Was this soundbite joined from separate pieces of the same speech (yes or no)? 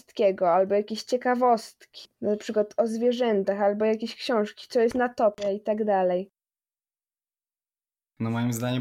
no